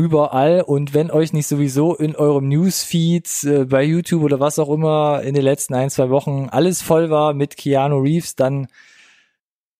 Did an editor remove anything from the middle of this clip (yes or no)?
no